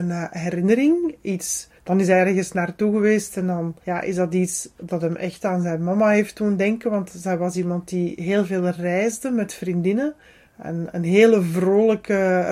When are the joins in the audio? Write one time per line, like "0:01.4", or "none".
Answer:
0:01.8
0:03.8
0:10.2